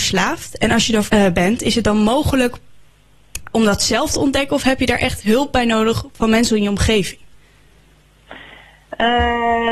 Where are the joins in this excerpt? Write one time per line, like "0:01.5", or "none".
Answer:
0:01.1
0:03.5